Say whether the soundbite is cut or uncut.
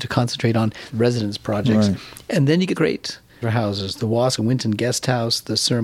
cut